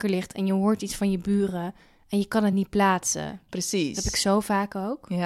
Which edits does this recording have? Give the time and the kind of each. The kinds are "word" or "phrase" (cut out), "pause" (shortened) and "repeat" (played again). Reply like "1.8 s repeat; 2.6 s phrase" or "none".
none